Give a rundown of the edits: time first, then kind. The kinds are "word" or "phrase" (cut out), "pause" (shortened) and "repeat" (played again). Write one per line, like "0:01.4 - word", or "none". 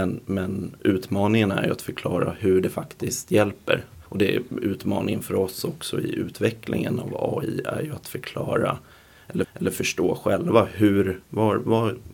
0:04.1 - pause
0:09.4 - repeat
0:11.2 - pause